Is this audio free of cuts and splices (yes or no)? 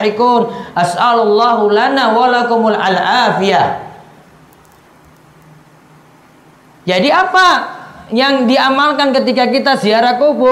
yes